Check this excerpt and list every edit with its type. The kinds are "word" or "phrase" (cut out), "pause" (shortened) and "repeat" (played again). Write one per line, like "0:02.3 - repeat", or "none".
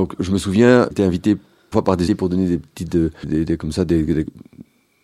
0:00.9 - word
0:01.7 - word
0:02.1 - word
0:03.2 - word